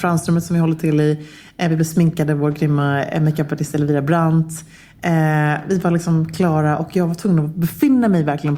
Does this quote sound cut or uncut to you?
uncut